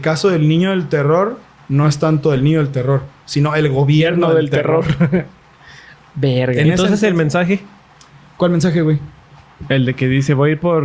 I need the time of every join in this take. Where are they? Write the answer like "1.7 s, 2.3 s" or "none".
none